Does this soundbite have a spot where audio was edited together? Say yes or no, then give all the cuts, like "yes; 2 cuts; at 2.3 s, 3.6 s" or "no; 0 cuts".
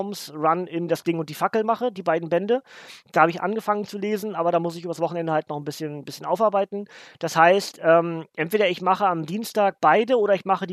no; 0 cuts